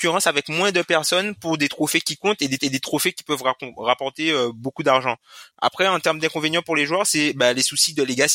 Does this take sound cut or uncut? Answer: cut